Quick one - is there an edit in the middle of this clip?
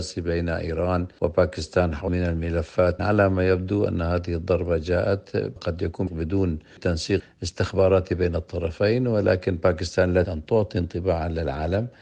yes; 4 cuts; at 2.1 s, 3.0 s, 5.6 s, 10.2 s

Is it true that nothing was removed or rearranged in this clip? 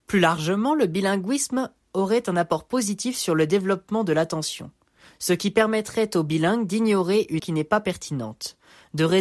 no; 1 cut; at 7.4 s

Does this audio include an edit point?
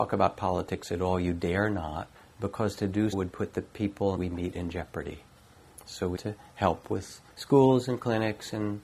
yes; 5 cuts; at 2.1 s, 3.1 s, 4.2 s, 6.2 s, 7.3 s

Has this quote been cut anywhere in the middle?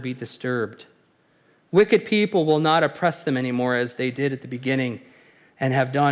no; 0 cuts

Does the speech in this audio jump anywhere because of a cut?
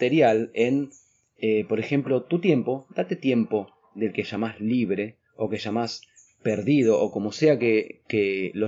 no; 0 cuts

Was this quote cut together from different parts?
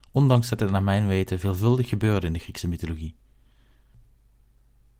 no; 0 cuts

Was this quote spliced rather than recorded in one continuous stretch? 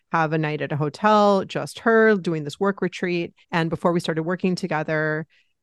yes; 1 cut; at 3.4 s

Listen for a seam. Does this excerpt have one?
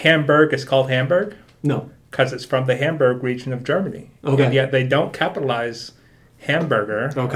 no; 0 cuts

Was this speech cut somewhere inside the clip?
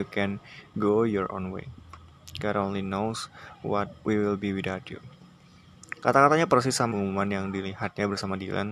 yes; 1 cut; at 6.9 s

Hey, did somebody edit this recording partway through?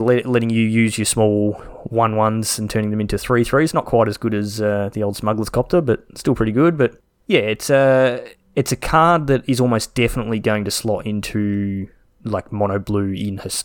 no; 0 cuts

